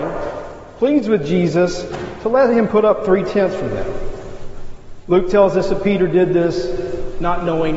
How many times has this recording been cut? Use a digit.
0